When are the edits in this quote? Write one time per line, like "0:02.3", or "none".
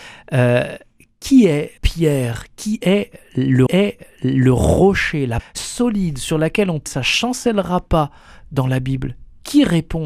0:01.8
0:03.7
0:05.4
0:06.9